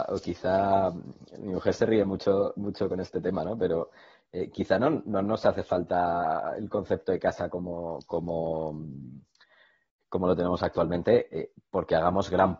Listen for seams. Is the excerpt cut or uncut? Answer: uncut